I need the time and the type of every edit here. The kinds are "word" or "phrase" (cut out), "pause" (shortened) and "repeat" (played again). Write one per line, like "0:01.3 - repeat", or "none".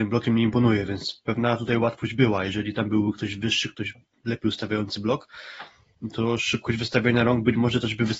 none

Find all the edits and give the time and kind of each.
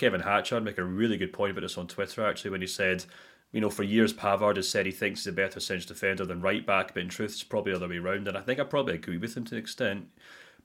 none

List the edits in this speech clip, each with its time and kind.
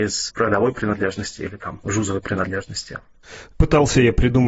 none

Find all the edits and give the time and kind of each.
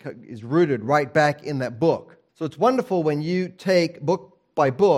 0:02.3 - pause

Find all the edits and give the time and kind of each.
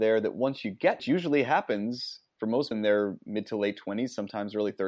0:01.0 - phrase
0:02.3 - pause
0:02.7 - word

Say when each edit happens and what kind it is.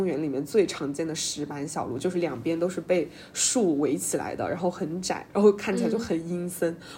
0:05.3 - pause

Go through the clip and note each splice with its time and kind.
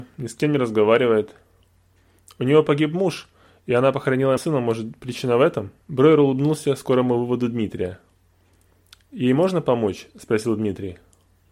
0:04.4 - word
0:05.8 - pause

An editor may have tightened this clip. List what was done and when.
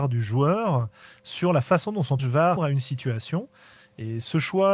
0:02.2 - word
0:02.6 - word

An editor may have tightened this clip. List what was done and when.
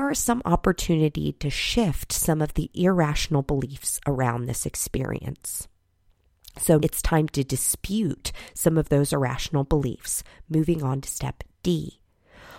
0:06.8 - word

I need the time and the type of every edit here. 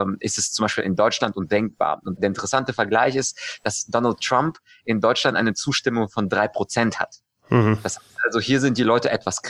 0:02.2 - word

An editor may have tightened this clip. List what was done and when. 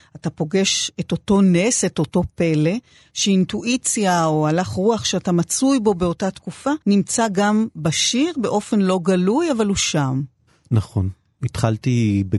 0:06.8 - pause

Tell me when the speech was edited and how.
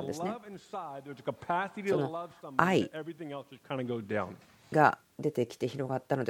none

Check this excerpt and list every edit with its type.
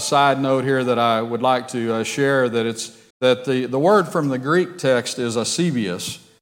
0:03.1 - pause

